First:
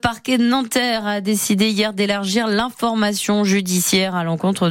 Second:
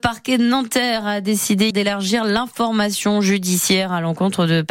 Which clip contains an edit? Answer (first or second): second